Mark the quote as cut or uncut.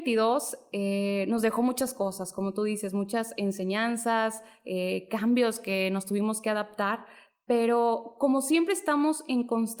uncut